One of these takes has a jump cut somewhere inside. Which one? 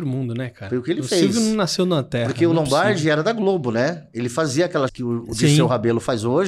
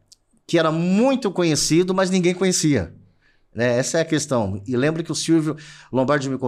first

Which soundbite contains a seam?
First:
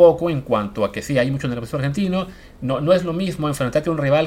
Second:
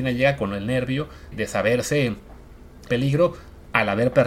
second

